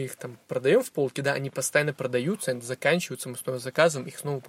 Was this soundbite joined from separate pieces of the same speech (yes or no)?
no